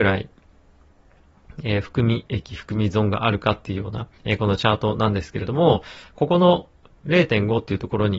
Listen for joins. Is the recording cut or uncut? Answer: cut